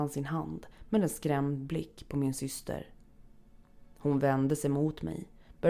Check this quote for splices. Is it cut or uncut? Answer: uncut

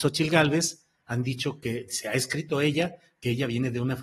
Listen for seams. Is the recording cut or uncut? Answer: uncut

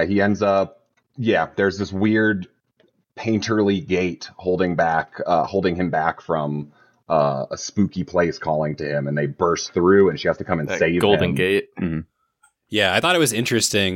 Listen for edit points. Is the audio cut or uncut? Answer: uncut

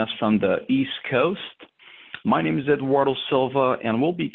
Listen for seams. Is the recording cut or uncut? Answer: uncut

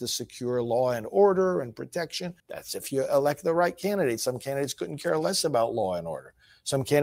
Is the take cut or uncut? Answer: cut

